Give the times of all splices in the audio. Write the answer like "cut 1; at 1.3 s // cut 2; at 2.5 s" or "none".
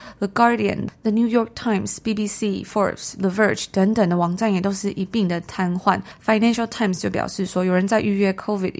none